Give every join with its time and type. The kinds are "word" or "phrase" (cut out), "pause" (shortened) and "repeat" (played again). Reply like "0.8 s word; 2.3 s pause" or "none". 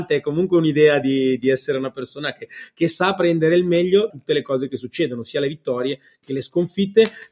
4.1 s word